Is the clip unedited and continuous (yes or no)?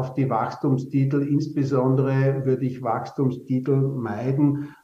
yes